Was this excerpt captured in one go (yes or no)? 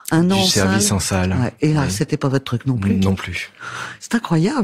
yes